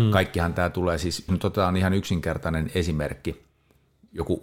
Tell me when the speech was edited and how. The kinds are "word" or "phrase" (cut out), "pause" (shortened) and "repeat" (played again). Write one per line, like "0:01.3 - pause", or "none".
0:01.3 - word